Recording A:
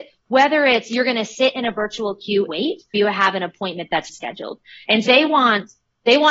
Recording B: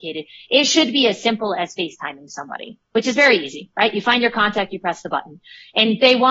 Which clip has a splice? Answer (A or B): A